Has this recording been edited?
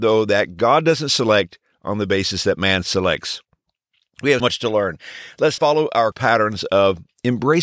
yes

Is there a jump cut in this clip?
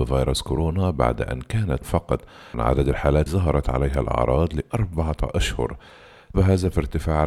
yes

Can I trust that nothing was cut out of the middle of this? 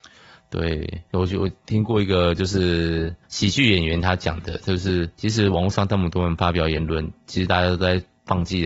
no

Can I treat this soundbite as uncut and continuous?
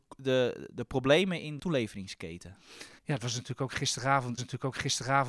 no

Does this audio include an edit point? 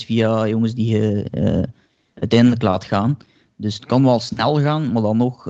no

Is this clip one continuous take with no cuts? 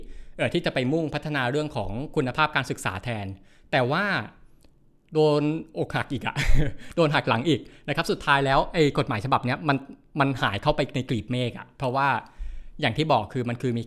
yes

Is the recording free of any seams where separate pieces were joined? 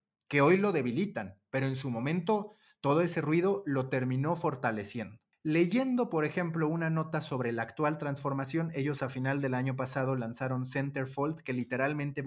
yes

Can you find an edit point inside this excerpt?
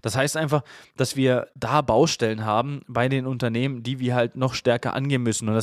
no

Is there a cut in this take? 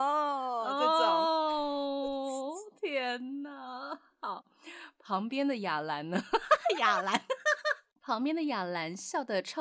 no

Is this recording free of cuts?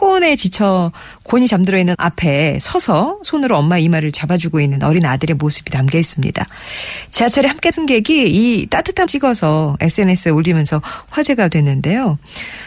no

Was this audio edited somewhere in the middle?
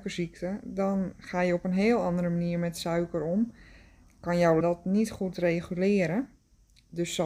yes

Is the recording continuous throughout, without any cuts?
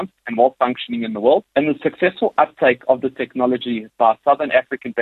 no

